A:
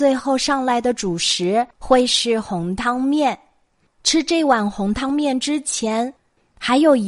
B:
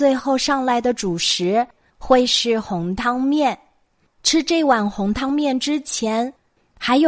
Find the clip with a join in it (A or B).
A